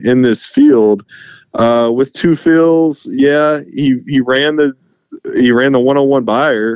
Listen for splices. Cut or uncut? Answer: uncut